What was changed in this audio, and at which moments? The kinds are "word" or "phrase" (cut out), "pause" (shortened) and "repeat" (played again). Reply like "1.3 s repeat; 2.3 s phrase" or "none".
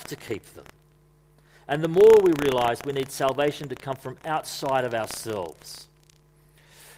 none